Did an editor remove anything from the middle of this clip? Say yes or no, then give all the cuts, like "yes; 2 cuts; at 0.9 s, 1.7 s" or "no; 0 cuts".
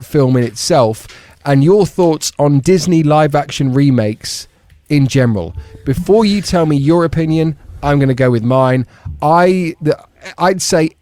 no; 0 cuts